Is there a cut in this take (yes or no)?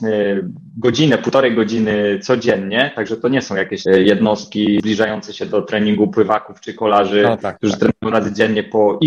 yes